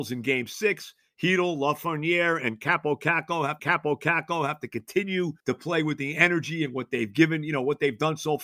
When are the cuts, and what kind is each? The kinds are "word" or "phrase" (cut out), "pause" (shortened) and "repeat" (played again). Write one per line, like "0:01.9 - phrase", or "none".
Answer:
0:03.6 - repeat
0:05.4 - pause